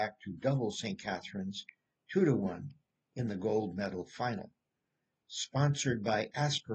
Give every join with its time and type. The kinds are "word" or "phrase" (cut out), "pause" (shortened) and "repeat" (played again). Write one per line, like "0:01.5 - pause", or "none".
none